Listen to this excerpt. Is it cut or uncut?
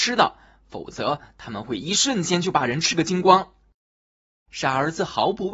uncut